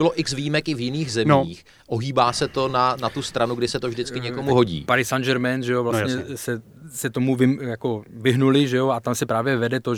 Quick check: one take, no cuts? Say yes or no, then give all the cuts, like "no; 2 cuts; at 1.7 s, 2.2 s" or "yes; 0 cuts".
yes; 0 cuts